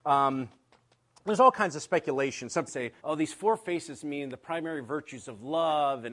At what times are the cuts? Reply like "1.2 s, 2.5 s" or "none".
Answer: 2.7 s, 3.0 s

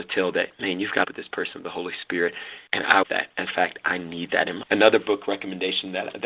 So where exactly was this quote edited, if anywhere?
1.0 s, 2.7 s, 3.0 s, 3.5 s, 4.6 s

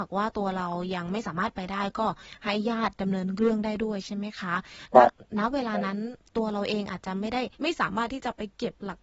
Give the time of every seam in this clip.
7.5 s

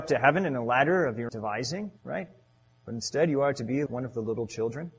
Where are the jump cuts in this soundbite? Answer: 1.3 s, 2.0 s, 3.9 s

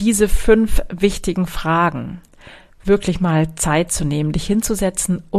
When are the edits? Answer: none

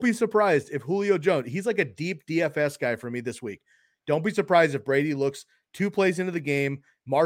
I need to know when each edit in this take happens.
none

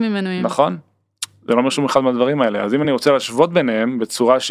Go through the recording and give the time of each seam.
none

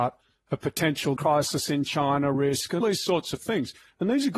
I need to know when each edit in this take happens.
1.2 s, 2.3 s, 2.8 s

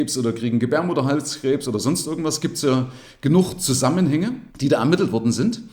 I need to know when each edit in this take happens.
4.5 s

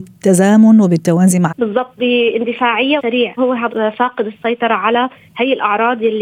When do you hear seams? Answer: 1.5 s, 2.0 s, 3.0 s, 3.4 s, 3.7 s

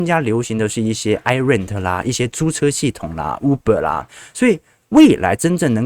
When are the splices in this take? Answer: none

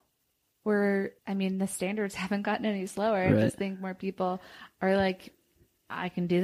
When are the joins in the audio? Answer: 1.2 s

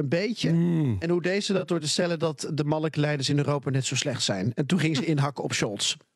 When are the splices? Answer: none

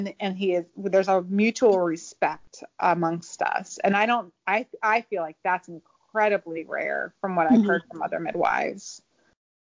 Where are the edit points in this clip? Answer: none

